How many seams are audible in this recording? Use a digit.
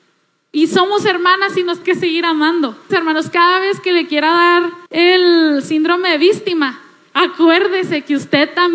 3